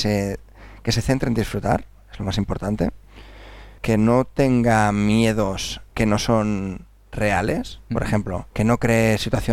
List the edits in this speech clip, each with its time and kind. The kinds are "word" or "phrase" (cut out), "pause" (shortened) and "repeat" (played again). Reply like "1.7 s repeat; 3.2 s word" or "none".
5.9 s pause; 7.8 s pause; 8.5 s pause